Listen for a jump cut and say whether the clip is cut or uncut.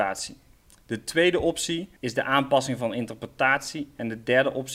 cut